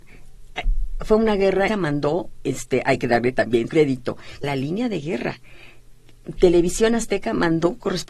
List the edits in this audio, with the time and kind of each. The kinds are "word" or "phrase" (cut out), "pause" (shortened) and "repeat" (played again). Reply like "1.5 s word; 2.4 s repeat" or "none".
1.7 s phrase; 3.7 s word; 4.4 s phrase